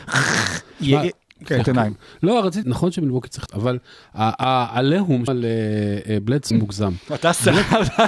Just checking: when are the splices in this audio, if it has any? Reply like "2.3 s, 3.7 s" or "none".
1.6 s, 2.6 s, 3.5 s, 5.3 s, 6.5 s